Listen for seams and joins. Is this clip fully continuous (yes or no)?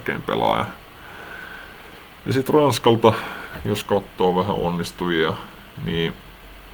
yes